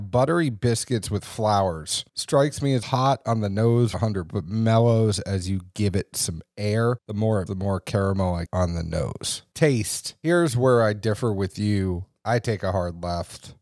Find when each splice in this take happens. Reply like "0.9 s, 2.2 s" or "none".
2.8 s, 3.9 s, 4.3 s, 7.5 s, 8.5 s